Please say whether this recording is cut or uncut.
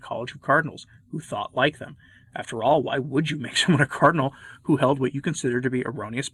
uncut